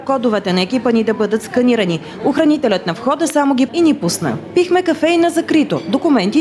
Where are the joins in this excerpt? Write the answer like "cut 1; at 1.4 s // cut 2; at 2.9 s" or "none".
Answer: cut 1; at 3.7 s